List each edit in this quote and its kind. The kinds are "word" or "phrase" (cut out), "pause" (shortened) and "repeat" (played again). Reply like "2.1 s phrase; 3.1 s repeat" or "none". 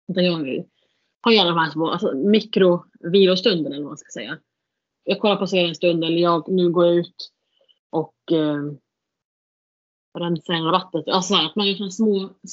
none